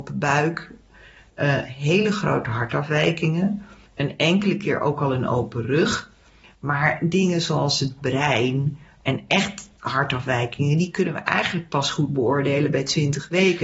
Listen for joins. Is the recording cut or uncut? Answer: uncut